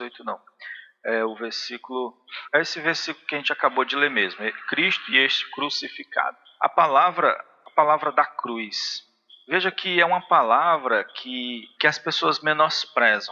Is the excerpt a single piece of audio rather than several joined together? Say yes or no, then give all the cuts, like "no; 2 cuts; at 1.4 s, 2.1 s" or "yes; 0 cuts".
yes; 0 cuts